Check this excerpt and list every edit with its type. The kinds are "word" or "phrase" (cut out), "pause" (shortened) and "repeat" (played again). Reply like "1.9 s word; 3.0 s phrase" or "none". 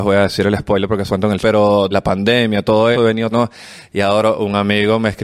1.1 s word; 1.4 s word; 1.9 s word; 2.9 s word; 3.3 s word

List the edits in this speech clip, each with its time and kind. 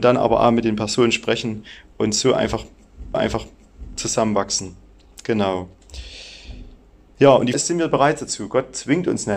3.1 s repeat; 7.5 s word

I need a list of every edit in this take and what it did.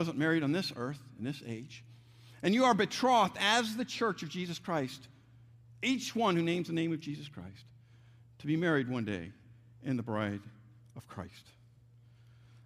none

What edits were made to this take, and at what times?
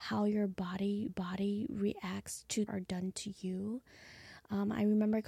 1.1 s repeat; 2.7 s phrase

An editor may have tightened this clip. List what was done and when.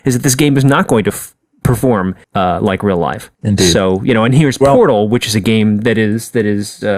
2.2 s pause; 3.3 s pause

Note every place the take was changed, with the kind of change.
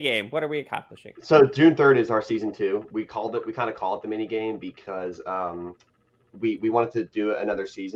none

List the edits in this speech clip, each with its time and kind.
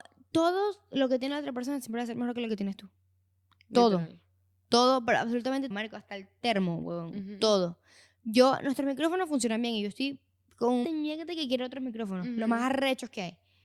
5.7 s word; 10.8 s word

